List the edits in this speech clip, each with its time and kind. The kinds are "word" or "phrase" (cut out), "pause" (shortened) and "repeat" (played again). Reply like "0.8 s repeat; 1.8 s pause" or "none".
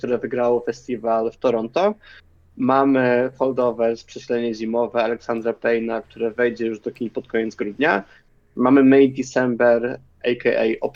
none